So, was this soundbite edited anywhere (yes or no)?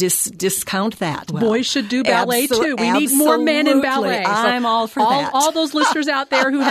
yes